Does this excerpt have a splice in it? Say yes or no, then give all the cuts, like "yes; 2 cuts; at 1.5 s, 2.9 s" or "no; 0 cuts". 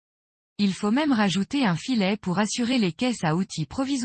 no; 0 cuts